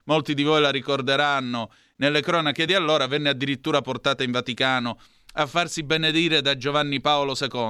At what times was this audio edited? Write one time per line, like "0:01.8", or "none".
none